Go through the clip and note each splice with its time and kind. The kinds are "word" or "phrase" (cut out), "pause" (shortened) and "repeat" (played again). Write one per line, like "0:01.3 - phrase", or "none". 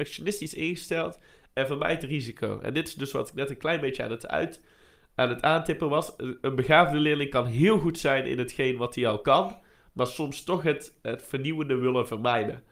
none